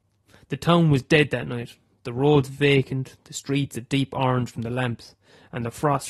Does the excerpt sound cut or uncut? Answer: uncut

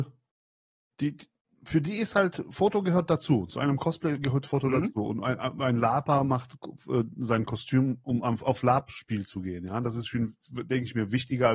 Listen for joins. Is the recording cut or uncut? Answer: uncut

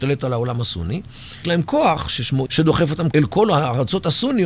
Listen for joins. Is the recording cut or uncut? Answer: cut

